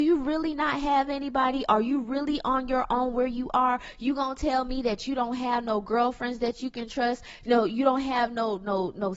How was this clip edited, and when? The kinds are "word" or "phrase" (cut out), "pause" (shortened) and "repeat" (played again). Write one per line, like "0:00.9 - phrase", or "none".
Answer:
none